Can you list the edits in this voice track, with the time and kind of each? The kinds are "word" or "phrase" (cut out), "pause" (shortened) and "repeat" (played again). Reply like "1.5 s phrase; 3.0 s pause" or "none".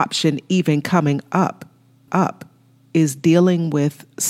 2.1 s repeat